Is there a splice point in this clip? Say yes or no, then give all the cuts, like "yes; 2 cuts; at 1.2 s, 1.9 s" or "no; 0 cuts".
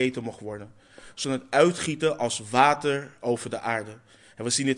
yes; 1 cut; at 1.2 s